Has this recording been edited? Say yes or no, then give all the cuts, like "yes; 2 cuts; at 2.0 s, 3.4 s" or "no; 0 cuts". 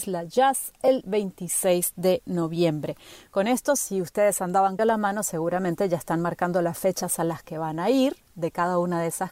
yes; 1 cut; at 4.8 s